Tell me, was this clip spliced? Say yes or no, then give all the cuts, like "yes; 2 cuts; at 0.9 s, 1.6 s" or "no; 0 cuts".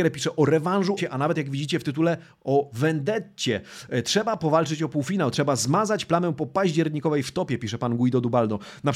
yes; 1 cut; at 1.0 s